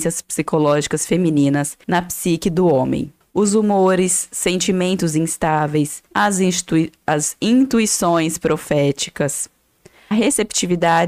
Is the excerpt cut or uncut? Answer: cut